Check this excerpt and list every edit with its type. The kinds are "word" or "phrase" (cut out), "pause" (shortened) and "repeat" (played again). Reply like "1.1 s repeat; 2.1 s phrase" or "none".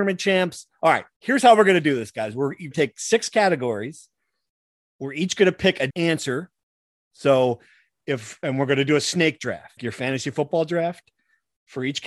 1.1 s pause; 2.7 s word; 5.9 s word; 9.8 s word